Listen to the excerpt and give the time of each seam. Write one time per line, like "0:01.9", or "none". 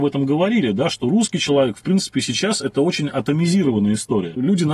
none